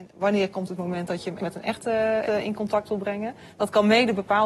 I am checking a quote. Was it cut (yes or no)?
yes